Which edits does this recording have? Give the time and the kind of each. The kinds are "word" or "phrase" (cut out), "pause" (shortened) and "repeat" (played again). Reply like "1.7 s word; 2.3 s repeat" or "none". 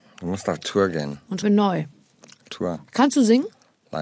1.4 s word; 2.5 s word

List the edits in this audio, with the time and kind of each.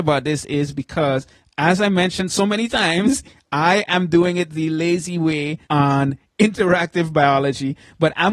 5.6 s pause

